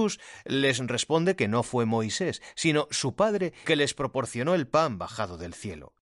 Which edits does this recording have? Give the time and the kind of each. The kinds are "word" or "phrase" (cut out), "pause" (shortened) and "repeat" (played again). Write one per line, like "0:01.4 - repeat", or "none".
0:03.6 - word